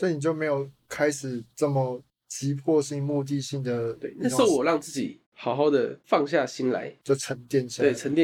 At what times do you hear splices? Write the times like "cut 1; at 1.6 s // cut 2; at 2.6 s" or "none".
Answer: cut 1; at 5.2 s // cut 2; at 6.0 s